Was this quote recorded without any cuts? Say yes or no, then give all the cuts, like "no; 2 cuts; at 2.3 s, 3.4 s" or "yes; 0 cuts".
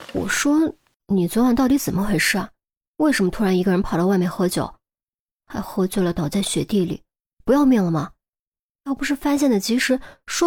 yes; 0 cuts